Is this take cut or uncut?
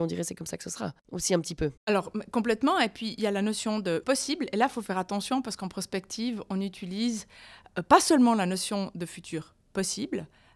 cut